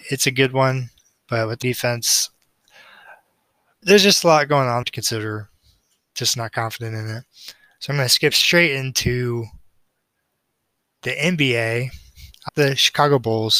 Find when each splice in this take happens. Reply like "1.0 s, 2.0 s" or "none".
1.6 s, 3.8 s, 4.8 s, 12.5 s